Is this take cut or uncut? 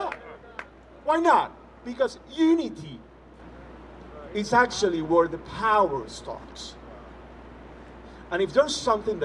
uncut